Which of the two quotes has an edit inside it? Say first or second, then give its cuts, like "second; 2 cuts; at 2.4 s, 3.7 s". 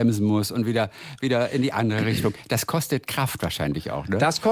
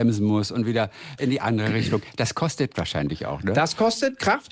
second; 2 cuts; at 1.2 s, 2.7 s